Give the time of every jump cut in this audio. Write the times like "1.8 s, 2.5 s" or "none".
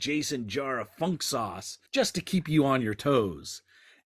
1.9 s